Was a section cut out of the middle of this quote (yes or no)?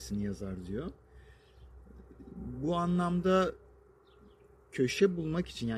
no